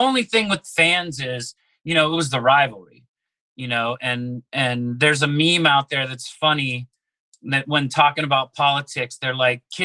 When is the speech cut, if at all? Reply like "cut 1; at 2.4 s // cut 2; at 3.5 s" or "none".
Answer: none